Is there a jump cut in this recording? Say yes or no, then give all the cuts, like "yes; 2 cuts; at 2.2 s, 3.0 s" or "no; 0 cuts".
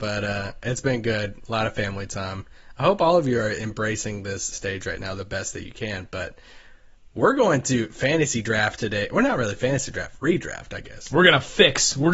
yes; 1 cut; at 4.5 s